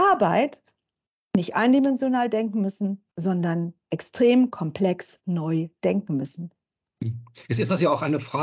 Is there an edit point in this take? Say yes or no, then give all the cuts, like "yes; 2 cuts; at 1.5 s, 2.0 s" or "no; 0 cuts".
yes; 1 cut; at 3.1 s